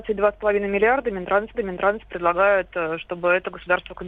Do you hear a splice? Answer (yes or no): yes